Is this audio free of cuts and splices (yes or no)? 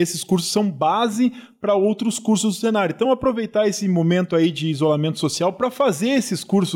yes